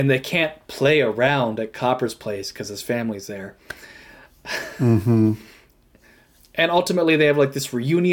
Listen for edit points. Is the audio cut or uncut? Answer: uncut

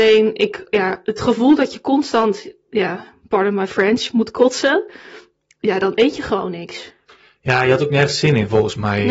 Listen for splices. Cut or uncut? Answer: uncut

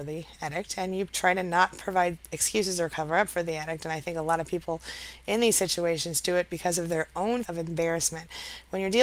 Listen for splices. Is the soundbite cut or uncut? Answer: cut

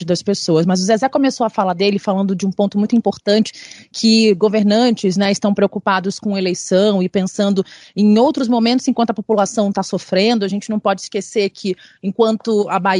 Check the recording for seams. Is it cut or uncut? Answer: uncut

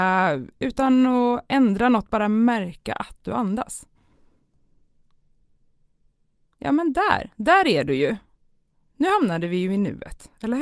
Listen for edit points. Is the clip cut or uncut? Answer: uncut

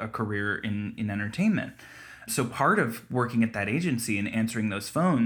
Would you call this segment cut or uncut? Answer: uncut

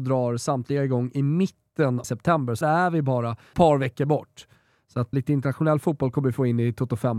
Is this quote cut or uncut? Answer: cut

